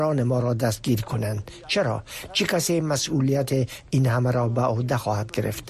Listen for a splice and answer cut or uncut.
uncut